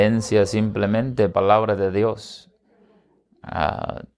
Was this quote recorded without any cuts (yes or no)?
no